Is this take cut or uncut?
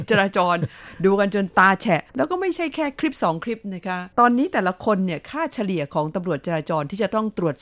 cut